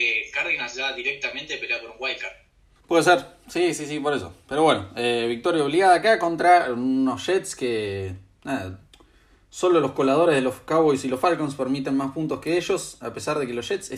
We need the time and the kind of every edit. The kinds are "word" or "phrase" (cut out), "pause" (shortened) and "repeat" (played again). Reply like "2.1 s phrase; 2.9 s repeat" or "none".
none